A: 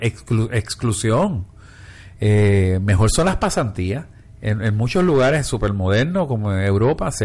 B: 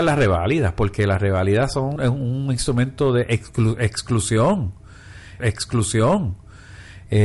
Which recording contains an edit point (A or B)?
B